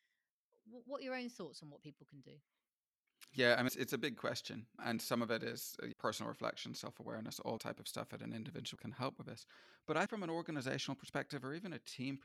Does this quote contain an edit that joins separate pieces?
yes; 6 cuts; at 3.7 s, 4.8 s, 5.9 s, 7.6 s, 8.8 s, 10.1 s

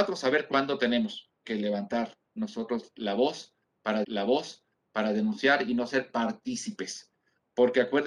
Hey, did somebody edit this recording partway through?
yes; 2 cuts; at 1.4 s, 4.0 s

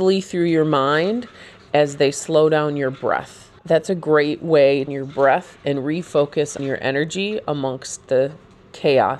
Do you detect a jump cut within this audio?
yes; 3 cuts; at 3.6 s, 4.9 s, 6.6 s

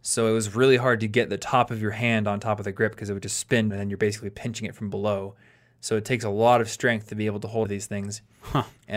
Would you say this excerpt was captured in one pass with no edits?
no; 2 cuts; at 3.7 s, 7.6 s

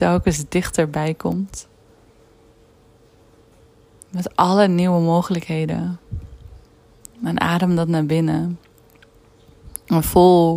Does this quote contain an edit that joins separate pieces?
no; 0 cuts

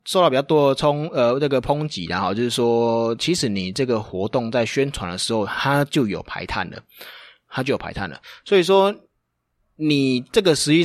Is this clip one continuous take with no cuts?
yes; 0 cuts

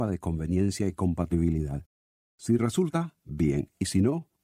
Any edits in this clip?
no; 0 cuts

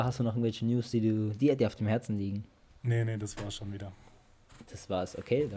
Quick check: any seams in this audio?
no; 0 cuts

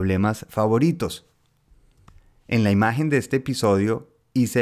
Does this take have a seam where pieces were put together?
no; 0 cuts

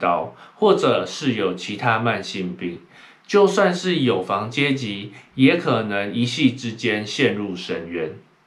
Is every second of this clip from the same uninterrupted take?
yes; 0 cuts

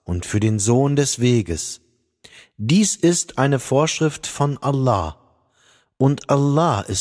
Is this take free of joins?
yes; 0 cuts

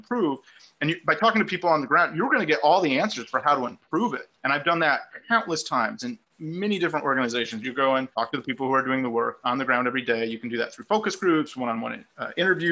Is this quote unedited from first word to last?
no; 2 cuts; at 4.4 s, 8.1 s

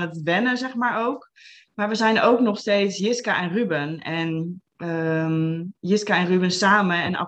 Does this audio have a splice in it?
no; 0 cuts

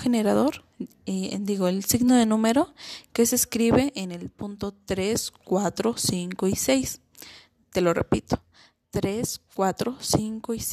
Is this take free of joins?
yes; 0 cuts

